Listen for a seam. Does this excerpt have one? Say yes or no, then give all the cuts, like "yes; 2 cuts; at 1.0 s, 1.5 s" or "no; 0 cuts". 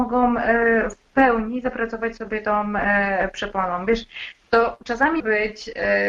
yes; 1 cut; at 5.2 s